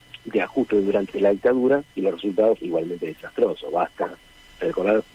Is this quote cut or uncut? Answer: cut